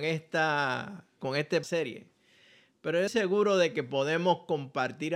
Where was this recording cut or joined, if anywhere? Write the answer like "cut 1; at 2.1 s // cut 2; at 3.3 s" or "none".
cut 1; at 1.2 s // cut 2; at 1.6 s // cut 3; at 3.1 s